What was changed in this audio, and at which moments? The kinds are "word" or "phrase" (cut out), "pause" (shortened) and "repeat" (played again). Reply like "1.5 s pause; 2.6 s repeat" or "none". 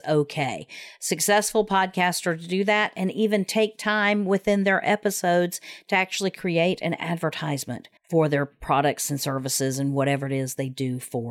8.0 s pause